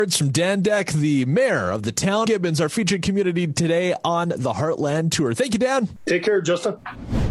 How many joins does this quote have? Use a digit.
1